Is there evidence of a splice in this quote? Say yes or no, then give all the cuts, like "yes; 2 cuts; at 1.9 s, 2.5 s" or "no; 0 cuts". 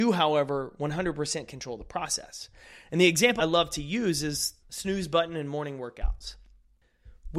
yes; 2 cuts; at 3.4 s, 4.6 s